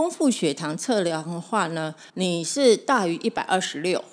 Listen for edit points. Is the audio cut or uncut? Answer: cut